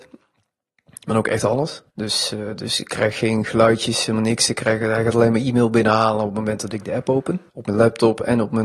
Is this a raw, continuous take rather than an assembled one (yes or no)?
no